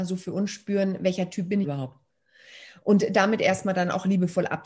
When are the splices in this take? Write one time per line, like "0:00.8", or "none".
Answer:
0:01.6